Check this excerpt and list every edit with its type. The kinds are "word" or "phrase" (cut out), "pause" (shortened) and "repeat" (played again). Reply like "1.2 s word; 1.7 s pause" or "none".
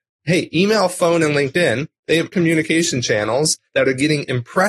2.3 s phrase